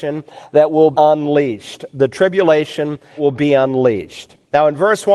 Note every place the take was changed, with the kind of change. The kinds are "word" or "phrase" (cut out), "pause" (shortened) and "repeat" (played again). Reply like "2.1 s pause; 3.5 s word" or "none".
0.9 s word; 3.2 s word